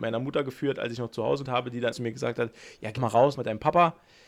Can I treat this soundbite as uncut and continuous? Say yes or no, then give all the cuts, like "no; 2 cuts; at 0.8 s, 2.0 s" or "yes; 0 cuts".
no; 4 cuts; at 1.4 s, 1.9 s, 3.0 s, 3.3 s